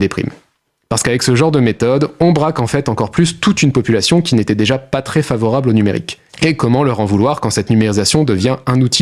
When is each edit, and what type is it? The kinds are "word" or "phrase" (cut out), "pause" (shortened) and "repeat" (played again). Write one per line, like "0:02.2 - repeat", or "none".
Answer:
0:06.3 - pause